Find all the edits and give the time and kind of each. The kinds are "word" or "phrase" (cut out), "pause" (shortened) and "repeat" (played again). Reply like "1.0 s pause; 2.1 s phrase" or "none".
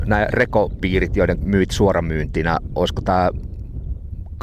1.4 s word; 1.7 s word